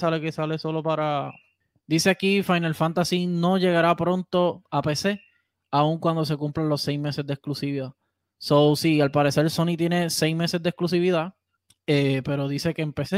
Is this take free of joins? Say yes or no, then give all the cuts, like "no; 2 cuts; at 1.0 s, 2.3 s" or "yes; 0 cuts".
yes; 0 cuts